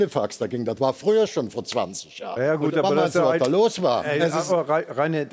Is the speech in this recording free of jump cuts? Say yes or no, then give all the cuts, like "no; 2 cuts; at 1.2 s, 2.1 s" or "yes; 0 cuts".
yes; 0 cuts